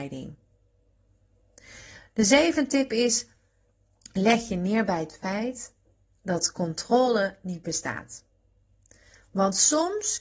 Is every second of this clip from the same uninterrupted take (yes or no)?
yes